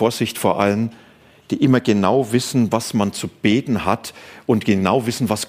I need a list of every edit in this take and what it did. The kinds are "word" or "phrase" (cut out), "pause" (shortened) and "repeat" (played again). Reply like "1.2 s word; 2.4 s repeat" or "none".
none